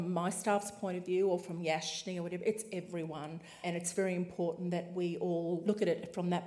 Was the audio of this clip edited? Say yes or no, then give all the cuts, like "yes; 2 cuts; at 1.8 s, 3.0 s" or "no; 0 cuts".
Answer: no; 0 cuts